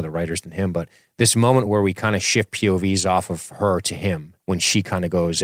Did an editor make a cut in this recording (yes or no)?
no